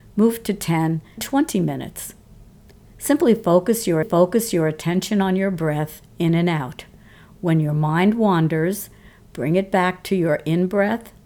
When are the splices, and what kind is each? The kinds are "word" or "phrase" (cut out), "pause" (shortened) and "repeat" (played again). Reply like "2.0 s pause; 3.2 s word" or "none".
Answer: 1.2 s phrase; 4.0 s repeat